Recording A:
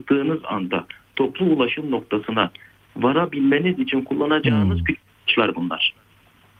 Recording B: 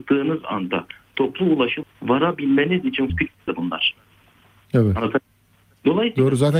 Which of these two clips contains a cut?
B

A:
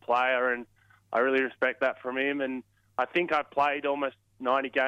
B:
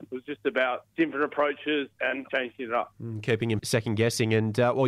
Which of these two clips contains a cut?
B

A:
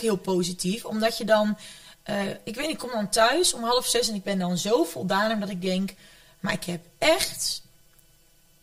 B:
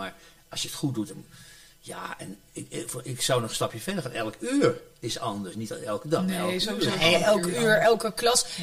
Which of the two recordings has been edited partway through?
B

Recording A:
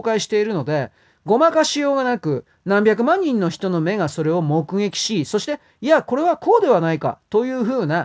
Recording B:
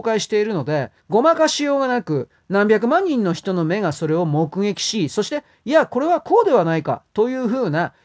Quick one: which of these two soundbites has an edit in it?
B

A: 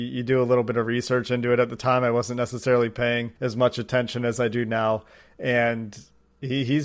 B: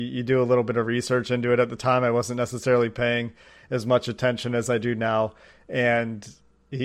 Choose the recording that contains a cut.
A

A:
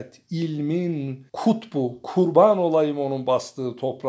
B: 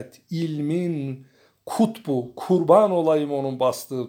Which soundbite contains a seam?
A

